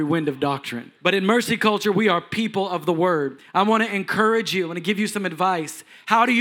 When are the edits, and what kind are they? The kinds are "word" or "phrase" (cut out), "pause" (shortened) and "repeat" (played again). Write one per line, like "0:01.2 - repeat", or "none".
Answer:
0:01.0 - pause